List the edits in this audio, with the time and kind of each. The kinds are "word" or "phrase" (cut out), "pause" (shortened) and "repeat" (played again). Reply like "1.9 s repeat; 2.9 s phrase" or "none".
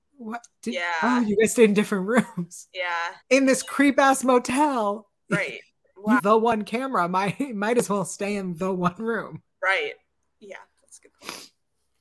3.2 s pause; 6.2 s phrase